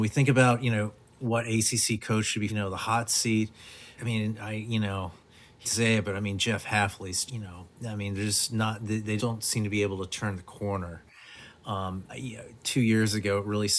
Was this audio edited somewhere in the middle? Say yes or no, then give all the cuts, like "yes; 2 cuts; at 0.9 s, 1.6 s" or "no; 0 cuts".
yes; 6 cuts; at 2.5 s, 4.0 s, 5.6 s, 7.3 s, 9.2 s, 12.1 s